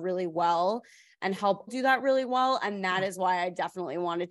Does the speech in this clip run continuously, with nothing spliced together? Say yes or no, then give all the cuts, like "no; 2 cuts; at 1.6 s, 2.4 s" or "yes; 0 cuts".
no; 1 cut; at 1.7 s